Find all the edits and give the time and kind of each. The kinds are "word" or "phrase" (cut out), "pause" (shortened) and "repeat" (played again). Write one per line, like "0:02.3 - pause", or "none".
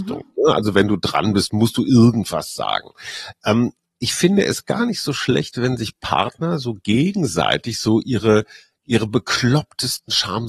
none